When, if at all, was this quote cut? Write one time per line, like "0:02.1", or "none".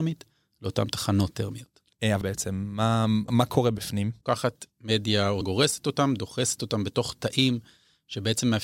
0:02.2
0:03.3
0:05.4